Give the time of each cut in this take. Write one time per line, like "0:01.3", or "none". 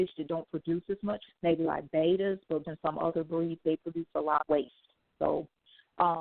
0:01.3
0:02.6
0:03.6
0:04.4